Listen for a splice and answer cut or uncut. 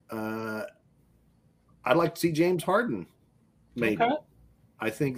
uncut